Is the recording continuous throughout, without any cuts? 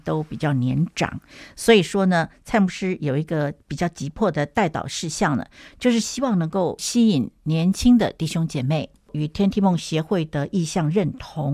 yes; 0 cuts

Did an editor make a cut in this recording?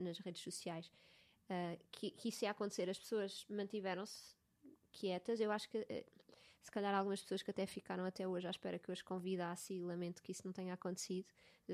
no; 0 cuts

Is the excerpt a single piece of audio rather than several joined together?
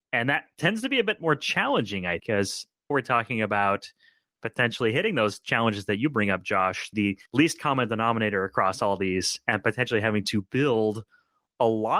no; 3 cuts; at 2.2 s, 2.9 s, 7.3 s

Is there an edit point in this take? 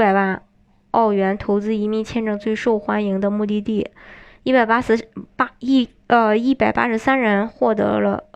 no; 0 cuts

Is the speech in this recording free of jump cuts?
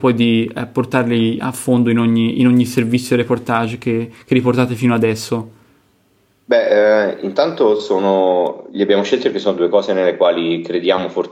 yes; 0 cuts

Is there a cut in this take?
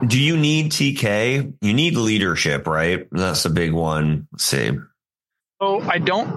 yes; 1 cut; at 5.2 s

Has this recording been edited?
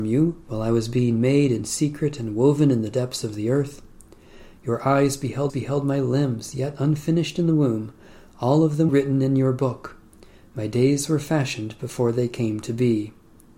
yes; 2 cuts; at 5.5 s, 8.9 s

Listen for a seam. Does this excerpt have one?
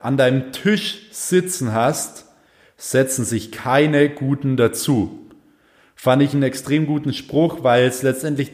no; 0 cuts

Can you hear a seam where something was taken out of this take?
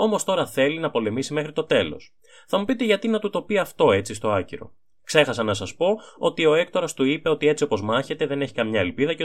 no; 0 cuts

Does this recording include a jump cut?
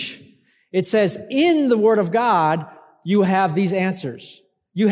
no; 0 cuts

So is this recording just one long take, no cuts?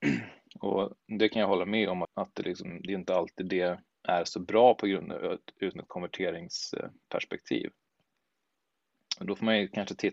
no; 3 cuts; at 2.0 s, 3.9 s, 5.7 s

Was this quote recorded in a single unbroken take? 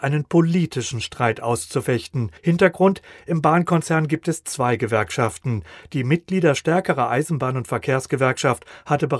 no; 1 cut; at 2.4 s

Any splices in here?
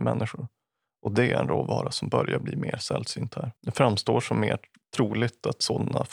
yes; 1 cut; at 3.6 s

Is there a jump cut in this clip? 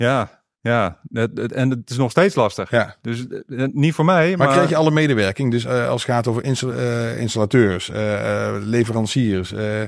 no; 0 cuts

